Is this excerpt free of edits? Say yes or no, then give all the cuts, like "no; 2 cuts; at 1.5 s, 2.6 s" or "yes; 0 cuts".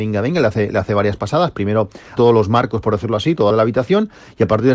no; 2 cuts; at 2.2 s, 3.5 s